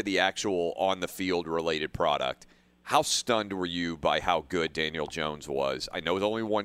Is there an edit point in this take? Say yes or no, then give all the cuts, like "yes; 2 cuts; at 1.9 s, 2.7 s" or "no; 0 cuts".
no; 0 cuts